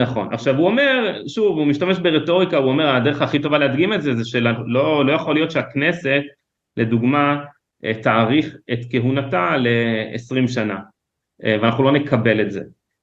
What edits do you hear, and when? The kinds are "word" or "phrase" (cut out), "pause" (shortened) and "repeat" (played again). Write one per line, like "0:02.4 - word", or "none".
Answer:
none